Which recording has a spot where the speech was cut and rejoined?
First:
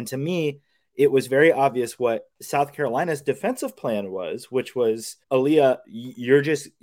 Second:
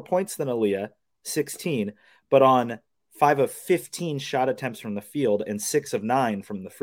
first; 2 cuts; at 2.3 s, 5.2 s

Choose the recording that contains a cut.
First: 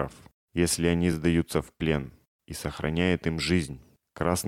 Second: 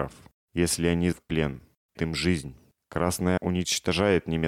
second; 3 cuts; at 1.1 s, 2.0 s, 3.4 s

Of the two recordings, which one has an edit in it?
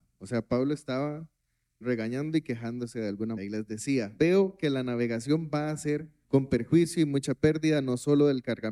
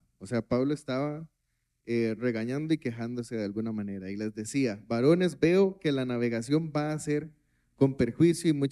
first; 4 cuts; at 1.8 s, 3.4 s, 4.2 s, 6.2 s

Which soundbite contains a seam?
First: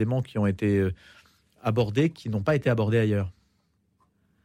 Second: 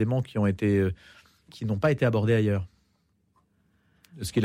second; 1 cut; at 1.5 s

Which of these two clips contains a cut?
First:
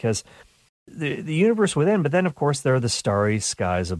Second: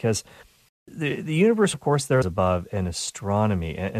second; 2 cuts; at 1.7 s, 2.2 s

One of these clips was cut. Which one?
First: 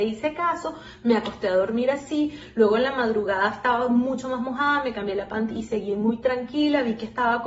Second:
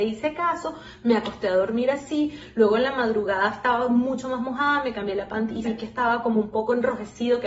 second; 1 cut; at 5.6 s

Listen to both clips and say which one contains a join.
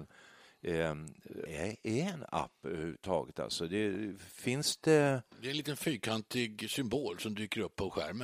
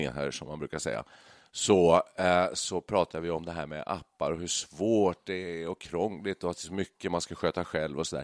first; 2 cuts; at 1.5 s, 5.3 s

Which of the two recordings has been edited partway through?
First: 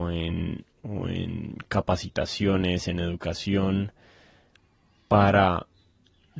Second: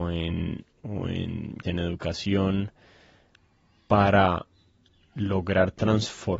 second; 1 cut; at 1.6 s

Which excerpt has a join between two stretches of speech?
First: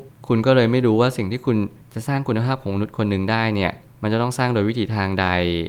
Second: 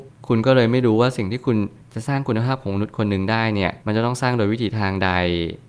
second; 1 cut; at 3.8 s

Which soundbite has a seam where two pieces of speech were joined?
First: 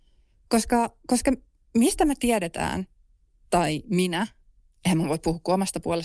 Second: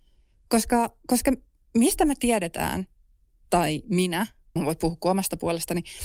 second; 1 cut; at 4.6 s

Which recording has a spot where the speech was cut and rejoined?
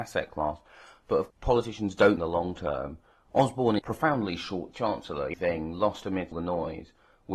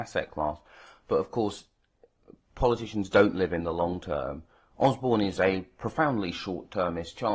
first; 6 cuts; at 1.3 s, 2.2 s, 3.8 s, 4.7 s, 5.3 s, 6.3 s

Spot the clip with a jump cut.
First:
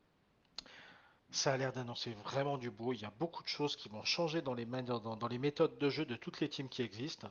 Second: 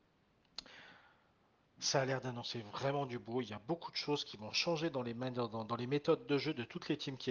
first; 1 cut; at 1.2 s

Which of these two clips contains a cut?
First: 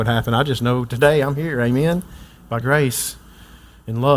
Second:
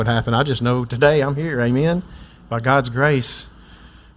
first; 1 cut; at 2.6 s

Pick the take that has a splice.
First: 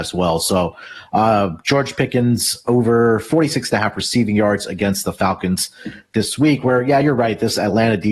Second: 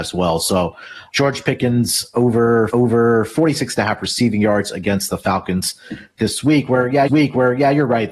second; 3 cuts; at 1.1 s, 2.7 s, 7.1 s

